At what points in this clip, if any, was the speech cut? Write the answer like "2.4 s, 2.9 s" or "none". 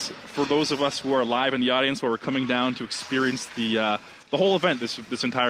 4.2 s